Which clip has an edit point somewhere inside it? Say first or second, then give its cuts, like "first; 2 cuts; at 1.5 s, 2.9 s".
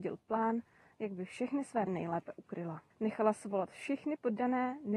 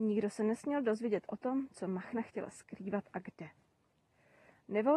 first; 2 cuts; at 1.9 s, 2.9 s